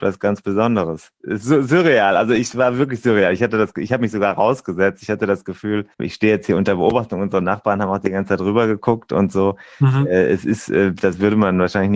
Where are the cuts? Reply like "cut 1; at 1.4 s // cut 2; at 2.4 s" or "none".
cut 1; at 5.9 s